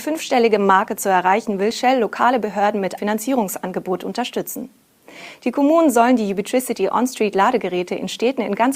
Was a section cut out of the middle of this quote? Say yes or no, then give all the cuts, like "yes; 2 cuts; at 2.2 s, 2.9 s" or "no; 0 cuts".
yes; 1 cut; at 3.0 s